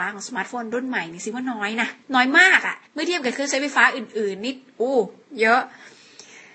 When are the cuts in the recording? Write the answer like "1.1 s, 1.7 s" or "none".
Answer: 2.0 s, 2.9 s